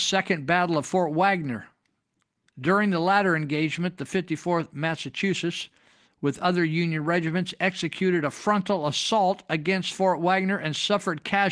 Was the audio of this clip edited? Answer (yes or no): no